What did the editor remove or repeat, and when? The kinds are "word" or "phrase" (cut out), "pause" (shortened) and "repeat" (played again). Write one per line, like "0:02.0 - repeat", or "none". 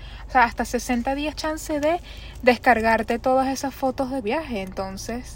0:01.3 - word
0:04.2 - word